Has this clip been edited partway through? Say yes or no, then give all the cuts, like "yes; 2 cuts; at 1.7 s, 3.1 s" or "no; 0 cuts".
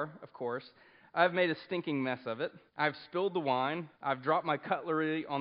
yes; 2 cuts; at 2.7 s, 3.9 s